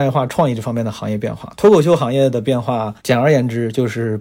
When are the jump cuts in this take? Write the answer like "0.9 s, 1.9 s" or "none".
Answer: 3.0 s

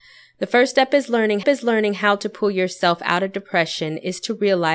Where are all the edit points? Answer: 1.4 s

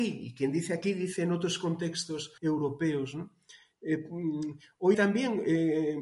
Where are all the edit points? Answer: 2.4 s, 4.9 s

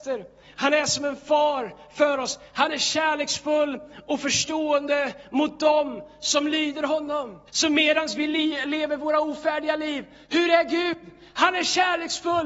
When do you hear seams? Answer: 7.5 s

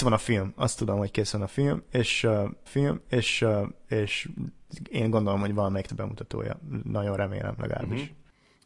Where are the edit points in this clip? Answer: 2.7 s, 5.9 s

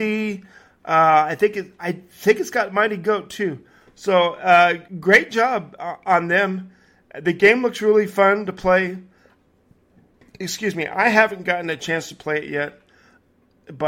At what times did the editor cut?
4.9 s

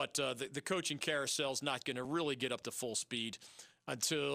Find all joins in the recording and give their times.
none

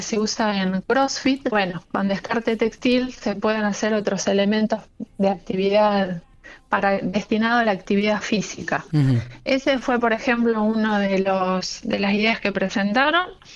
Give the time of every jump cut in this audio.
1.5 s

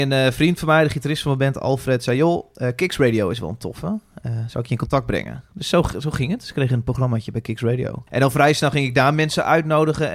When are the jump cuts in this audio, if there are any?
8.1 s

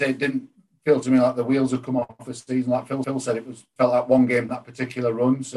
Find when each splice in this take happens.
3.0 s, 3.8 s, 4.5 s

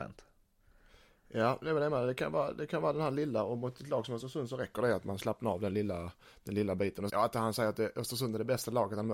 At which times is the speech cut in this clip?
7.1 s

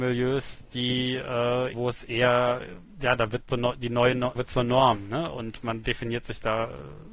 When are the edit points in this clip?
1.7 s, 3.5 s, 4.4 s

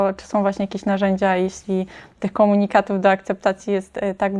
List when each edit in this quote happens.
none

